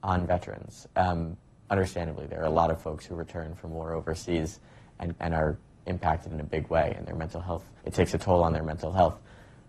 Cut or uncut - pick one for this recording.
cut